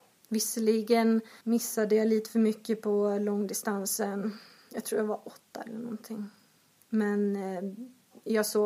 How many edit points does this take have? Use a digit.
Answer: 1